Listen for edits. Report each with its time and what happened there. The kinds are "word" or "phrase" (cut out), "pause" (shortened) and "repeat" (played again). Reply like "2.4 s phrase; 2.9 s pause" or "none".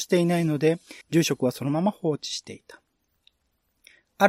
1.0 s pause